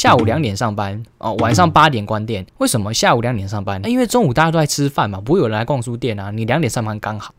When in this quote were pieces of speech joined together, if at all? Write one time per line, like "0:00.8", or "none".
0:01.1
0:02.5